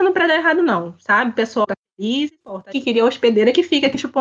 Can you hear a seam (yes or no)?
yes